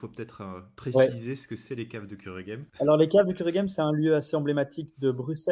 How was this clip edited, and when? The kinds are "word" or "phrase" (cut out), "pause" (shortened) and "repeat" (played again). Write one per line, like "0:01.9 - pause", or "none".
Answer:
0:02.7 - pause